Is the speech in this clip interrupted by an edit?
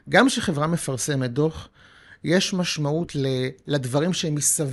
no; 0 cuts

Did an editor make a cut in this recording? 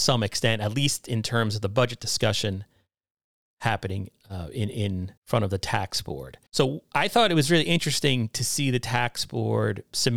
yes; 2 cuts; at 5.2 s, 6.5 s

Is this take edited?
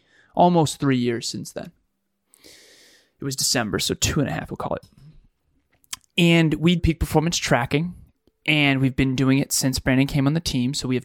yes; 2 cuts; at 4.5 s, 6.8 s

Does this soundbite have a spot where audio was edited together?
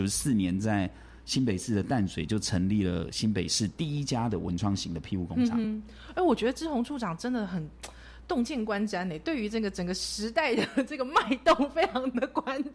no; 0 cuts

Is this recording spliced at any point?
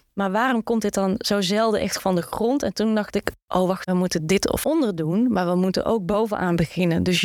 yes; 4 cuts; at 2.0 s, 3.4 s, 3.8 s, 4.6 s

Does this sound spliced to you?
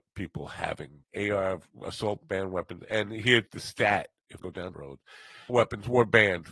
yes; 5 cuts; at 1.0 s, 3.5 s, 4.4 s, 4.7 s, 5.5 s

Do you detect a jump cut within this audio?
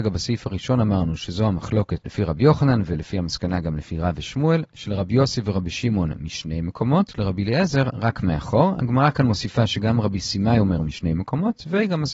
no; 0 cuts

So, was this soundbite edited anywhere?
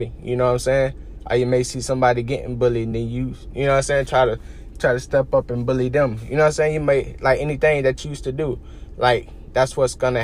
no; 0 cuts

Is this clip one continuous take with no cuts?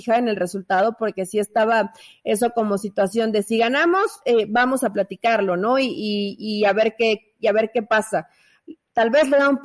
yes; 0 cuts

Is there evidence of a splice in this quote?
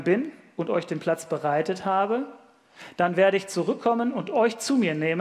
no; 0 cuts

